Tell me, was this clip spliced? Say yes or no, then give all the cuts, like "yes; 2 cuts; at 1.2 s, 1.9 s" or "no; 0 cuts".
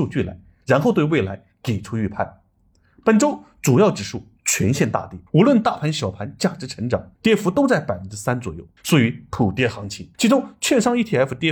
yes; 4 cuts; at 5.3 s, 7.2 s, 8.8 s, 10.1 s